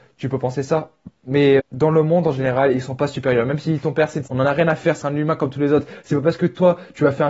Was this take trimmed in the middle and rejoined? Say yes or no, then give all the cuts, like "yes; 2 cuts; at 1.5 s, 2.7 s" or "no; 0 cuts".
yes; 3 cuts; at 1.6 s, 4.3 s, 5.0 s